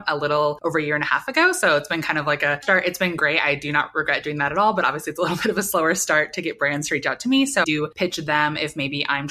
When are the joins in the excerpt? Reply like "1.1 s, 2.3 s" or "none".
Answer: 2.6 s, 7.6 s